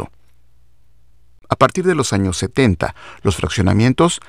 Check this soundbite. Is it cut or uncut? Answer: uncut